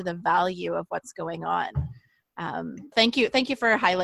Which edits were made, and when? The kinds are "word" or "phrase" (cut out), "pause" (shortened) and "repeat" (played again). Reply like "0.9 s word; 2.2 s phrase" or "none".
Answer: 2.9 s word